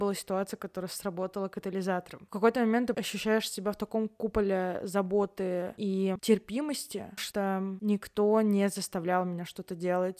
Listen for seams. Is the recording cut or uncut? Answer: cut